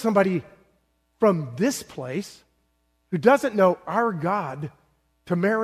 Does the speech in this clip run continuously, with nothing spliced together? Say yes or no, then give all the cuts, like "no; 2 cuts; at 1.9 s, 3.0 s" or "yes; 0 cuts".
yes; 0 cuts